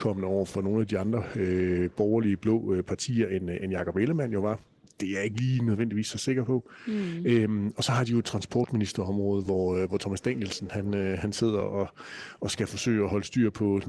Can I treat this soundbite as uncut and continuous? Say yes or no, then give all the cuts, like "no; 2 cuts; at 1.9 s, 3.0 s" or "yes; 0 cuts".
yes; 0 cuts